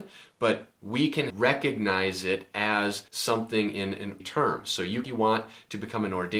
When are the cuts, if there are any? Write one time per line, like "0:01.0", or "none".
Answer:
0:01.3
0:03.1
0:04.2
0:05.0